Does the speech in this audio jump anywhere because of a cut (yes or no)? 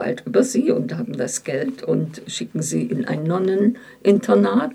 no